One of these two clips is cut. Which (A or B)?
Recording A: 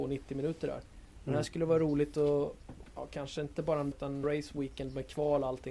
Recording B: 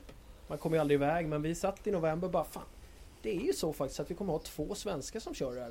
A